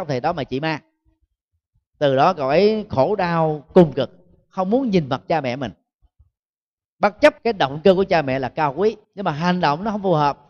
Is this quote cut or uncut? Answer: cut